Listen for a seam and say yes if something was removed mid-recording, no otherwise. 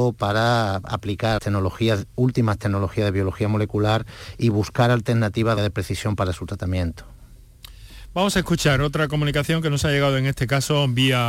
yes